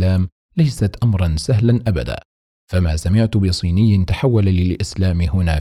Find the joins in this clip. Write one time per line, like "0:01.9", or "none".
none

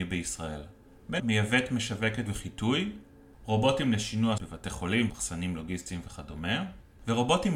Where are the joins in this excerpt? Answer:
0:01.2
0:02.3
0:04.4
0:05.1

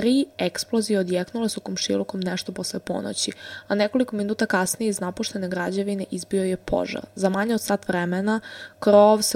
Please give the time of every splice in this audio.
none

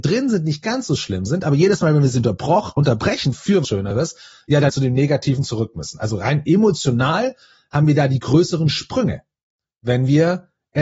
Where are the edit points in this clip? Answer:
0:03.6
0:04.7

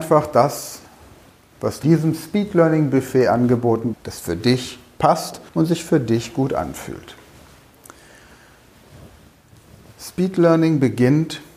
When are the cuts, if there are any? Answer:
0:01.8
0:03.9
0:05.5

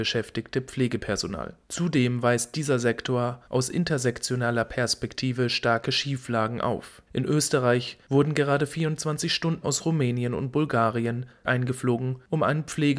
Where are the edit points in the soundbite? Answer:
0:01.6
0:07.1
0:09.6
0:11.4

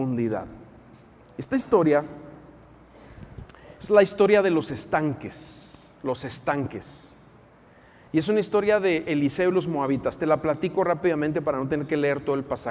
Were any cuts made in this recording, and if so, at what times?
none

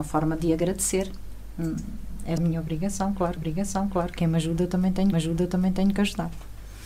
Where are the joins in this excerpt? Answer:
0:02.4
0:03.4
0:05.1

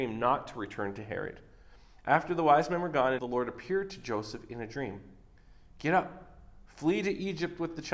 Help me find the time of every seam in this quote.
0:03.2

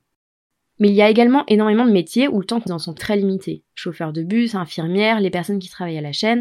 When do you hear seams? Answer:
0:02.7
0:03.0
0:03.7

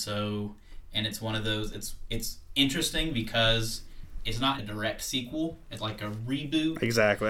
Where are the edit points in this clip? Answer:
0:04.6
0:05.8

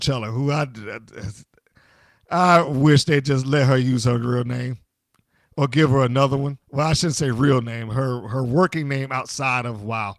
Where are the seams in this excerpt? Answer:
0:06.6

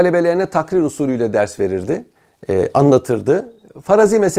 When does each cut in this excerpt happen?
0:02.1

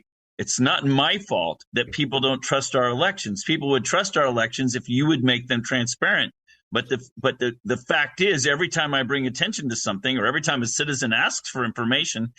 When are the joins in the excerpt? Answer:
none

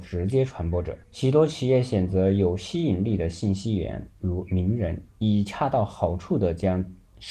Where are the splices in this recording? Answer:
0:01.0

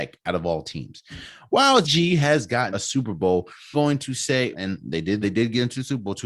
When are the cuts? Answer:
0:01.8
0:02.7
0:03.7
0:04.5
0:05.2

